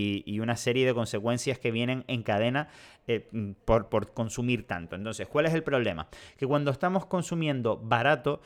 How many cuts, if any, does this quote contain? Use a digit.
0